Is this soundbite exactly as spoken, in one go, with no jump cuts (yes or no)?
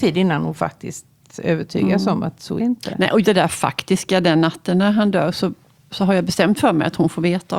no